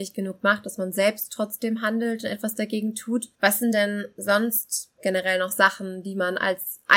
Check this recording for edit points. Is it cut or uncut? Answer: uncut